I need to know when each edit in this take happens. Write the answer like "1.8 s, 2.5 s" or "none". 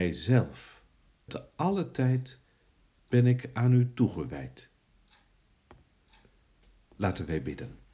1.3 s